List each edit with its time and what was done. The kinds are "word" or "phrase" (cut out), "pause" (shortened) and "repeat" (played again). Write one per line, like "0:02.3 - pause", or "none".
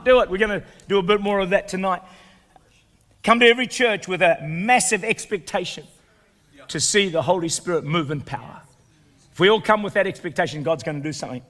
none